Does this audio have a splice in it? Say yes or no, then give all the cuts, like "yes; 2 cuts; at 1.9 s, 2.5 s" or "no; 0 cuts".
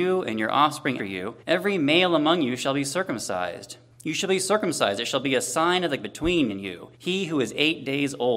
yes; 6 cuts; at 1.0 s, 1.4 s, 3.9 s, 6.0 s, 6.5 s, 6.9 s